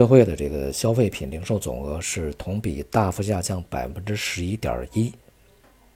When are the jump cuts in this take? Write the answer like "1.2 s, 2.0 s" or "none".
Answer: none